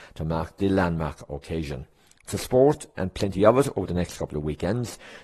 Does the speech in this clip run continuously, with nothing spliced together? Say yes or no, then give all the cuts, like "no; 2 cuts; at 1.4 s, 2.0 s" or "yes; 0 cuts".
yes; 0 cuts